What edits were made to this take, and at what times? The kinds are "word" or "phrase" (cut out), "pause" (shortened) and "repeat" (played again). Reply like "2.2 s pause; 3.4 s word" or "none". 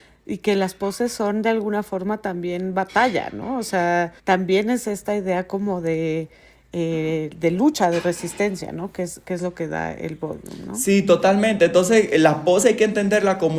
4.2 s pause